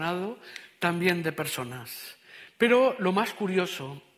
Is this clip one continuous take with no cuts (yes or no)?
yes